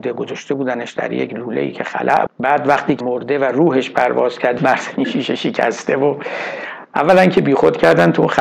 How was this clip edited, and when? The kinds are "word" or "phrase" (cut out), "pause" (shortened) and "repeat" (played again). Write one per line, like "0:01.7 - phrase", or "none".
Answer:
0:02.3 - word
0:03.0 - word
0:04.6 - word
0:05.0 - word